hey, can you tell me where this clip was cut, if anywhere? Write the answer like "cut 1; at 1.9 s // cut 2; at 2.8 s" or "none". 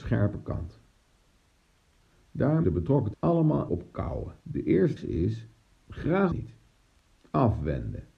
cut 1; at 2.6 s // cut 2; at 3.1 s // cut 3; at 3.7 s // cut 4; at 4.4 s // cut 5; at 5.0 s // cut 6; at 6.3 s